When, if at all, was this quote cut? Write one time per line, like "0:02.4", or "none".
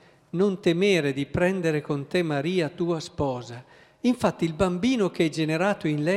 none

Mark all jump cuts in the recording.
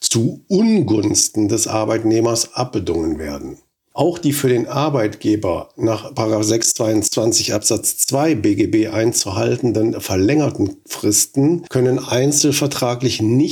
none

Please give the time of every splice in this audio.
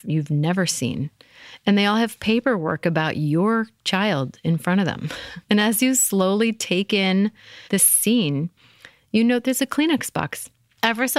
0:05.4
0:07.7

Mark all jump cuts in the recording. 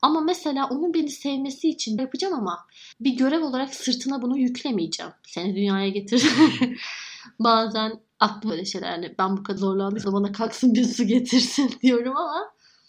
0:02.0
0:02.9
0:08.5
0:09.6
0:10.0

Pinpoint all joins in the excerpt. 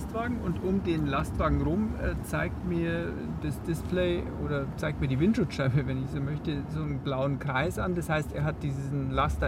none

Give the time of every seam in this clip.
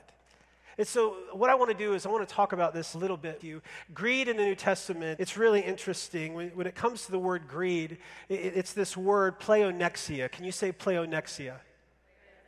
0:02.9
0:03.4
0:05.2

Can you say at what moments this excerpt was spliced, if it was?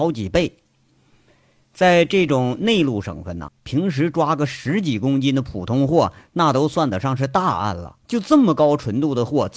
0:03.5
0:08.0

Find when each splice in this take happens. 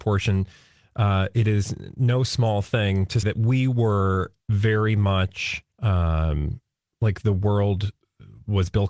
0:03.2
0:04.4
0:05.7

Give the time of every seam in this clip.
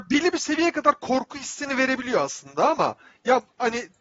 none

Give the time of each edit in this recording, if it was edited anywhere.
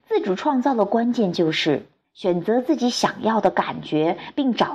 0:02.0

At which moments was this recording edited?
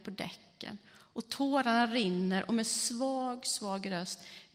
none

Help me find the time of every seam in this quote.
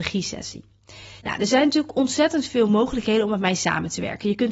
0:01.2

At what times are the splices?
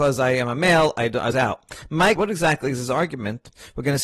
0:01.3
0:02.2

